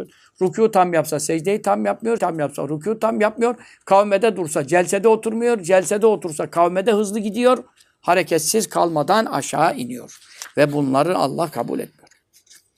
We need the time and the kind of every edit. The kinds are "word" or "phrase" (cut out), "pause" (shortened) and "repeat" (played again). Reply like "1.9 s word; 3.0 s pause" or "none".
2.2 s word